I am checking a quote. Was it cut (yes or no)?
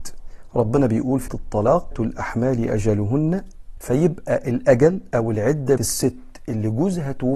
yes